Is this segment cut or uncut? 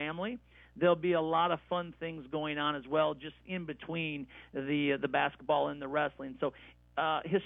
uncut